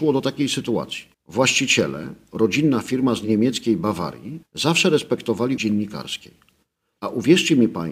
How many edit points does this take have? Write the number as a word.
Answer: three